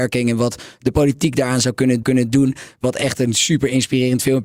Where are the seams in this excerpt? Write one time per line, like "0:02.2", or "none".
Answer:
0:02.0